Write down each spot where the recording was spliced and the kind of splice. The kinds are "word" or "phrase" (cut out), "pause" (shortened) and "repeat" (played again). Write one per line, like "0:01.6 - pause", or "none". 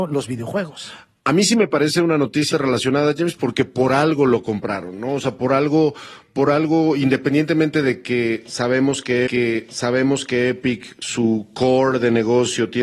0:02.5 - word
0:09.3 - repeat